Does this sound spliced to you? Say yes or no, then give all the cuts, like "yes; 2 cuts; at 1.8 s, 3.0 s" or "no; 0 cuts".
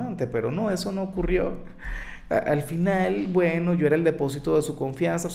no; 0 cuts